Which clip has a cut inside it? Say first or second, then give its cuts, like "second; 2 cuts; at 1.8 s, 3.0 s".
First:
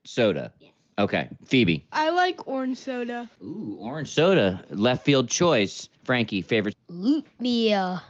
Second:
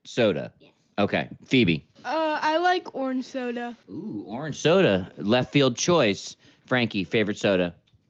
first; 3 cuts; at 1.9 s, 5.9 s, 6.7 s